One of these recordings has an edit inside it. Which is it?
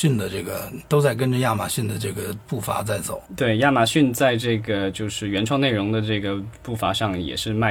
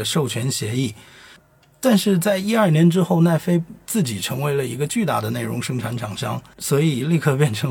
first; 1 cut; at 3.3 s

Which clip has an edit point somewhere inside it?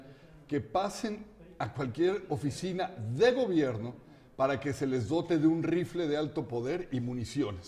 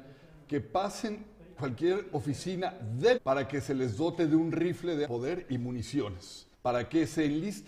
second; 4 cuts; at 1.6 s, 3.2 s, 5.0 s, 6.5 s

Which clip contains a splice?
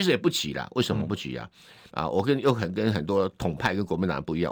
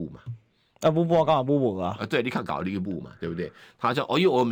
first; 1 cut; at 1.9 s

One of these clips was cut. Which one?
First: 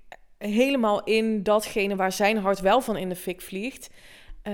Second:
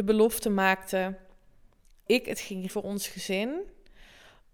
second; 2 cuts; at 2.1 s, 2.7 s

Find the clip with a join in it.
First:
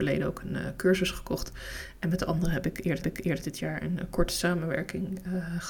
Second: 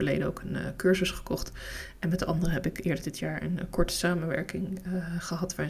first; 1 cut; at 3.0 s

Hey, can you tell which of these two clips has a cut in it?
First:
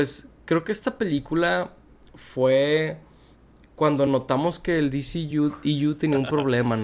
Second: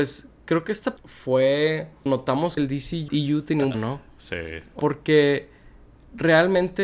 second; 6 cuts; at 1.0 s, 2.1 s, 2.6 s, 3.1 s, 3.7 s, 4.8 s

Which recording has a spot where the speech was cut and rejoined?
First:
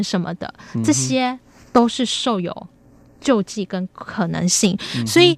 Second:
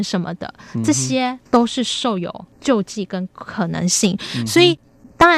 second; 2 cuts; at 1.5 s, 2.5 s

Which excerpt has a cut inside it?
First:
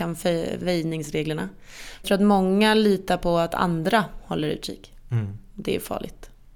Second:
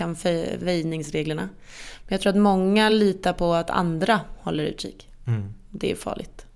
first; 1 cut; at 2.0 s

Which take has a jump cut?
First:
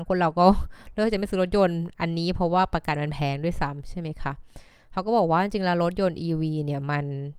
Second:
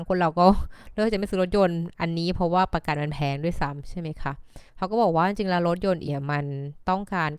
second; 2 cuts; at 4.7 s, 6.1 s

